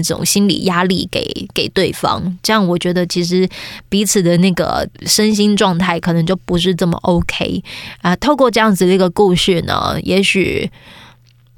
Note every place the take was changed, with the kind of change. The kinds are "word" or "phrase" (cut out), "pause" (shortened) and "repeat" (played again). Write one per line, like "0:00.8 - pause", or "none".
0:04.9 - pause